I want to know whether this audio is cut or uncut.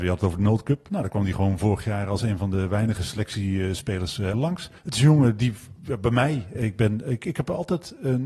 cut